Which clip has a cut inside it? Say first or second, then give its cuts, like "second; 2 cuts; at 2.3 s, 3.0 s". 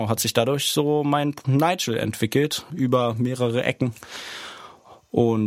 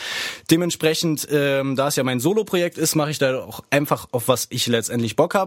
first; 2 cuts; at 1.4 s, 2.7 s